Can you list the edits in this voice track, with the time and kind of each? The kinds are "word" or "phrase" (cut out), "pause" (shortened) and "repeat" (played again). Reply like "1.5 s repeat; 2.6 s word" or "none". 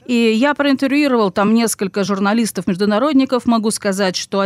none